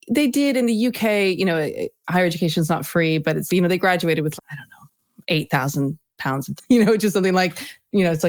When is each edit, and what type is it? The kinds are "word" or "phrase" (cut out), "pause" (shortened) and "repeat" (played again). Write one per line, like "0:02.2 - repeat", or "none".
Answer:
0:03.5 - word
0:04.4 - word
0:06.6 - word